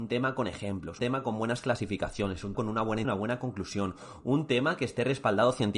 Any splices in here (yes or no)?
yes